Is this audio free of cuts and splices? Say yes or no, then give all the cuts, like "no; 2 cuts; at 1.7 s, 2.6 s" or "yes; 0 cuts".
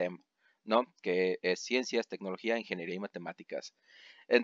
yes; 0 cuts